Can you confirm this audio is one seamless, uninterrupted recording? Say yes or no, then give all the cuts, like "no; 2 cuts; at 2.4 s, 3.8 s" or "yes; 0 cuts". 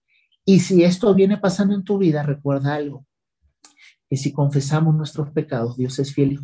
yes; 0 cuts